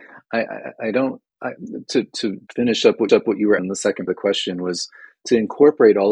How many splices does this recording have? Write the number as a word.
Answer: five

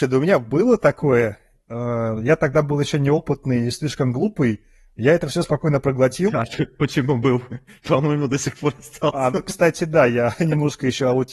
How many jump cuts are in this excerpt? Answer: zero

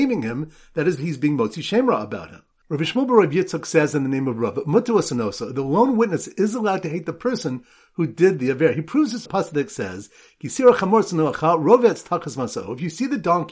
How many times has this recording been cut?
one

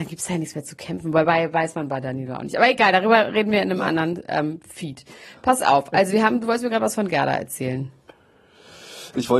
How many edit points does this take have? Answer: one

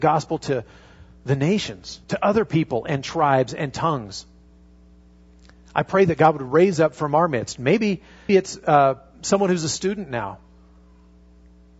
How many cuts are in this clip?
two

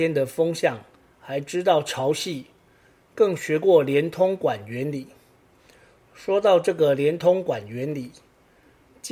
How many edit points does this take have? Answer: zero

